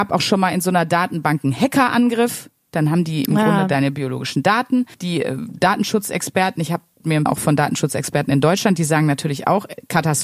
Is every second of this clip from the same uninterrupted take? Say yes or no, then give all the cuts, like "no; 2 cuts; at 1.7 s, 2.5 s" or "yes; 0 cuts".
no; 2 cuts; at 4.9 s, 7.3 s